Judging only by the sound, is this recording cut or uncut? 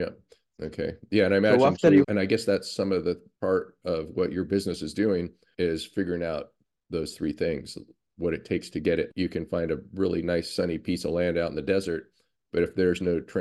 uncut